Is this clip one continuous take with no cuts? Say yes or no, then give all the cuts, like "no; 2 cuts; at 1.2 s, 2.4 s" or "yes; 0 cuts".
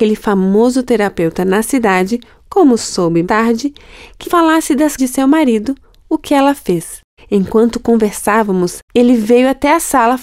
no; 5 cuts; at 3.2 s, 4.2 s, 5.0 s, 7.2 s, 8.9 s